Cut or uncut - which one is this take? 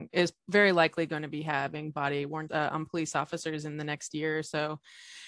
cut